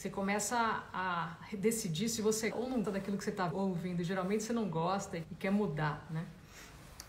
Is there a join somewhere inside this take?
yes; 4 cuts; at 2.5 s, 2.8 s, 3.5 s, 5.2 s

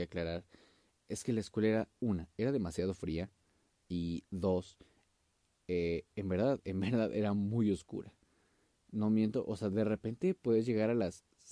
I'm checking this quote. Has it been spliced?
no; 0 cuts

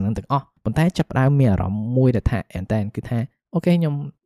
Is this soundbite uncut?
no; 1 cut; at 2.6 s

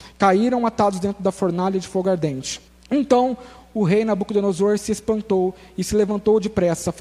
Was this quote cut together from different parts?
yes; 1 cut; at 2.7 s

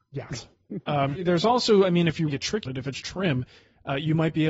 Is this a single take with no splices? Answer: no; 4 cuts; at 1.2 s, 2.3 s, 2.7 s, 3.0 s

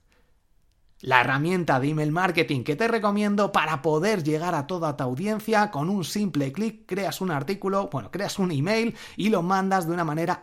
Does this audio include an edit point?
no; 0 cuts

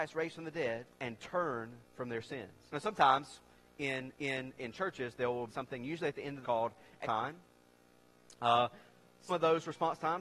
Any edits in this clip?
yes; 8 cuts; at 0.9 s, 1.8 s, 2.7 s, 4.1 s, 5.5 s, 6.4 s, 7.0 s, 9.3 s

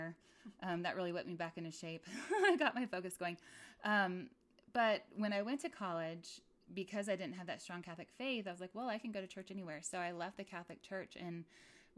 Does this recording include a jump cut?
no; 0 cuts

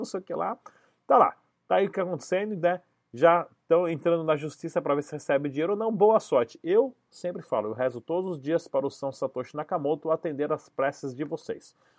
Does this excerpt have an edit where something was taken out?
no; 0 cuts

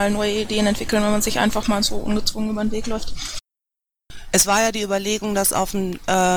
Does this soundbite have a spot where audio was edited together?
no; 0 cuts

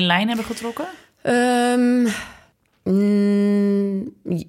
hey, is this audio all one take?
no; 1 cut; at 2.5 s

